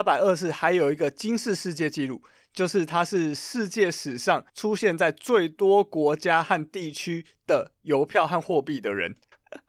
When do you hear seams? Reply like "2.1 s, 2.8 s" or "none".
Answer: 4.5 s